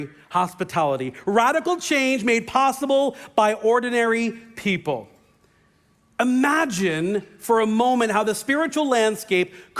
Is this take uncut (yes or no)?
yes